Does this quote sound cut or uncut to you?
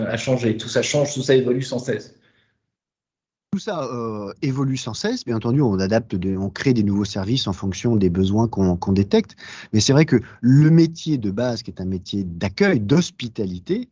uncut